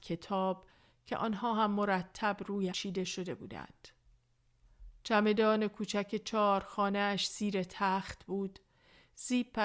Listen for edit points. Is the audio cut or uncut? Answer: cut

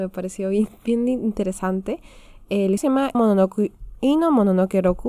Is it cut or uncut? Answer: cut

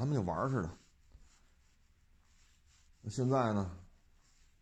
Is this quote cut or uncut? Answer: uncut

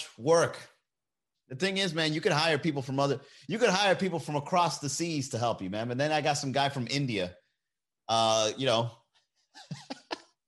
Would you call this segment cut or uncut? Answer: uncut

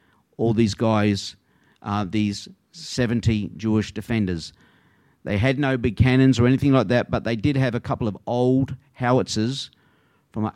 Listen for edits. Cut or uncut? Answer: uncut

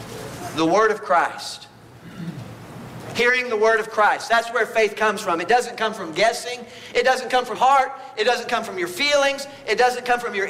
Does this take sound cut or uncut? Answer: cut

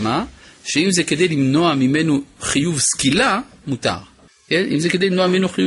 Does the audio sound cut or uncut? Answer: uncut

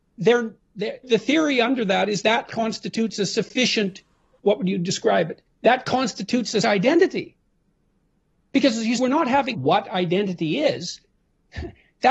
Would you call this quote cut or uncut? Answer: cut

